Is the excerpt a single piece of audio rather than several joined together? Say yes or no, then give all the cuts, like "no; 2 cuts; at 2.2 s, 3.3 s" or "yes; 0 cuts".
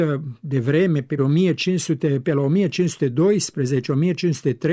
no; 1 cut; at 1.2 s